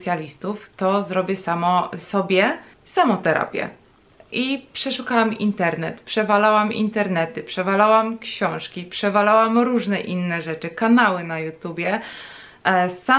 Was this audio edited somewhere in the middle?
yes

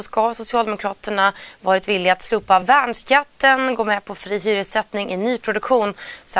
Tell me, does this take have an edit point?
no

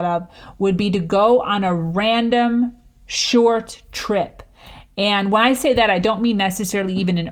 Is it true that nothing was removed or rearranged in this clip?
yes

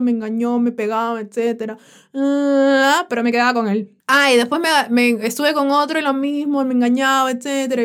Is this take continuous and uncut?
no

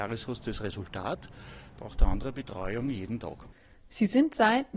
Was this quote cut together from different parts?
yes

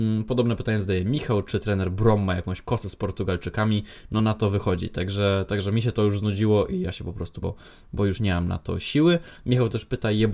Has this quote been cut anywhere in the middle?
yes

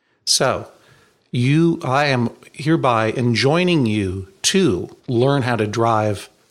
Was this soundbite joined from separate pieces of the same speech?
yes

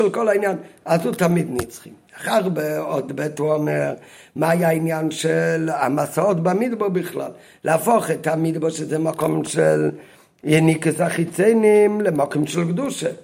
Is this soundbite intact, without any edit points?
yes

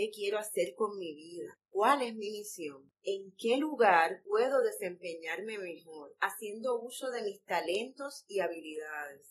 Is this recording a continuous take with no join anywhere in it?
yes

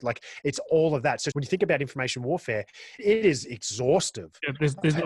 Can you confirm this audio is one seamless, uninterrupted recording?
no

